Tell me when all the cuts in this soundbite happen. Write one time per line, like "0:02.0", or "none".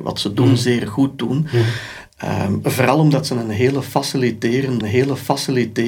0:04.8